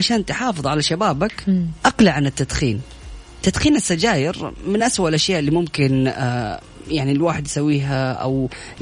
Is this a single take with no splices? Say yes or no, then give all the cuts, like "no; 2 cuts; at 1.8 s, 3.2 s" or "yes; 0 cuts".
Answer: yes; 0 cuts